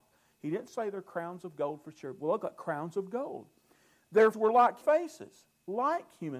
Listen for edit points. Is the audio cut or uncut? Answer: cut